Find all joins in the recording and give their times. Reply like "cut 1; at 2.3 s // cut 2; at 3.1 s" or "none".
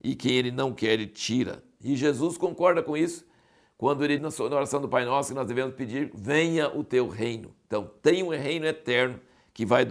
cut 1; at 4.2 s